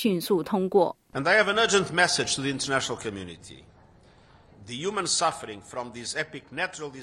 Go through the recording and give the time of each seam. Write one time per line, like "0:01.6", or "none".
none